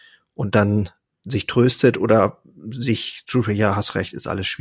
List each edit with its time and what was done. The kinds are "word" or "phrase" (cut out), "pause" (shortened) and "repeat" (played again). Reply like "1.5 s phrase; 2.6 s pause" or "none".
1.1 s word